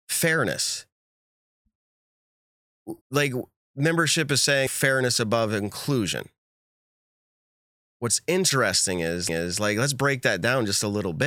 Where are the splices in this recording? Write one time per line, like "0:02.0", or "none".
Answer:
0:03.0
0:04.7
0:09.3